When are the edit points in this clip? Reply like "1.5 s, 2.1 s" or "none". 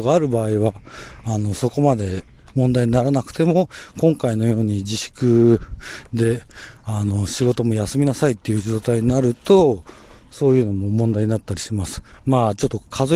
2.5 s